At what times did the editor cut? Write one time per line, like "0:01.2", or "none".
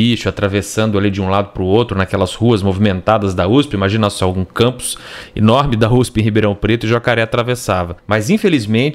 0:08.0